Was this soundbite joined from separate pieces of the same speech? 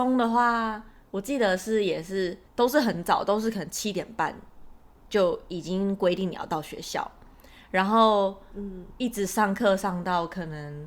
yes; 1 cut; at 2.5 s

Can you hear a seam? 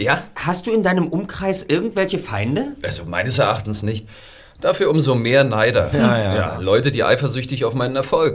no; 0 cuts

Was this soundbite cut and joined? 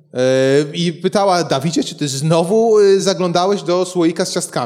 no; 0 cuts

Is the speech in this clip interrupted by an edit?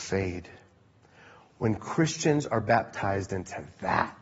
no; 0 cuts

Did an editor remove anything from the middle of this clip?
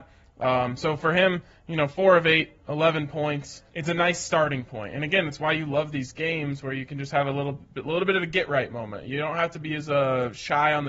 yes; 1 cut; at 3.7 s

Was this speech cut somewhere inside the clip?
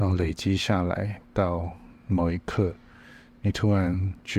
no; 0 cuts

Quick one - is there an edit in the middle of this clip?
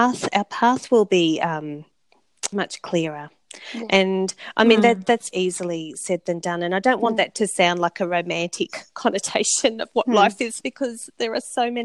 yes; 3 cuts; at 2.5 s, 5.3 s, 10.6 s

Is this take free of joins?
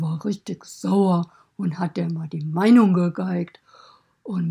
yes; 0 cuts

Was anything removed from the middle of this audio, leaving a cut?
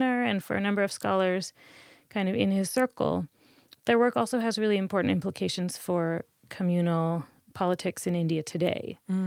no; 0 cuts

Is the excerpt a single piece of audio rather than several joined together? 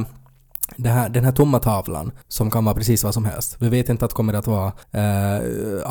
no; 2 cuts; at 2.2 s, 4.8 s

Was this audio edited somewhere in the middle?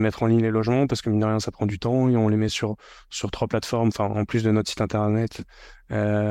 no; 0 cuts

